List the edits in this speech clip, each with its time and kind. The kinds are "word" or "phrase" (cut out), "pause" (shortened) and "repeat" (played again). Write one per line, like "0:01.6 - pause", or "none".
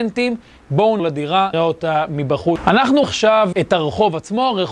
0:01.0 - word
0:01.5 - word
0:03.0 - word
0:03.5 - word